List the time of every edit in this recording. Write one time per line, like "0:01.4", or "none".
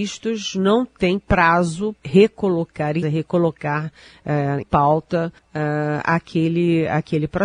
0:02.0
0:03.0
0:04.6
0:05.4

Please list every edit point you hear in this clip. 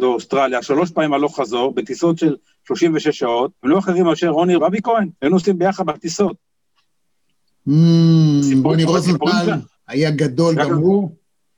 0:03.6
0:04.6
0:05.2
0:09.8

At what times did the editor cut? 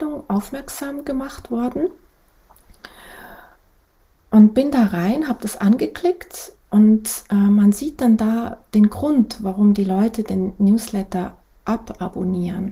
0:06.6

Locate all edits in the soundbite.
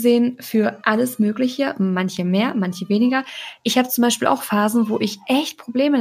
none

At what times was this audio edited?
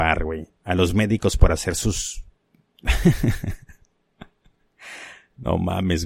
none

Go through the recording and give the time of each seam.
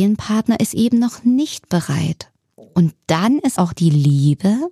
0:03.6

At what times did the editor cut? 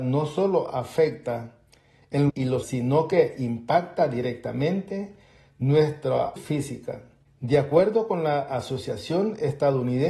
0:02.3
0:02.6
0:06.4

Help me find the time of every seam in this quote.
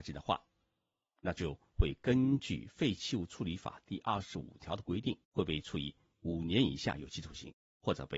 0:05.2

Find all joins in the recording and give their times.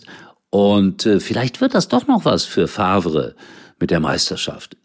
none

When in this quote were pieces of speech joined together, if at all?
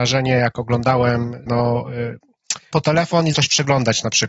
0:01.5
0:02.7
0:03.3

